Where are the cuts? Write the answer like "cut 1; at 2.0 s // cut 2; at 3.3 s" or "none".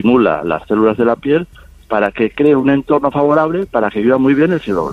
none